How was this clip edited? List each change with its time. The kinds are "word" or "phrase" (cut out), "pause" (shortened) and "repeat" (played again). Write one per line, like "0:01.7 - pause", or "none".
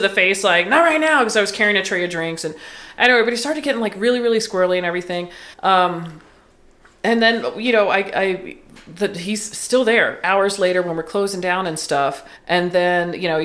0:05.5 - pause
0:12.4 - pause